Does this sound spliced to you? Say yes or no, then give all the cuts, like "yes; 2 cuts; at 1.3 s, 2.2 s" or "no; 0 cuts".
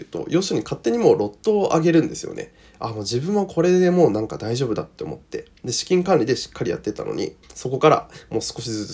yes; 1 cut; at 7.4 s